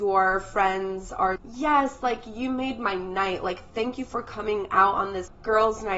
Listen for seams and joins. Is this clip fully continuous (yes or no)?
no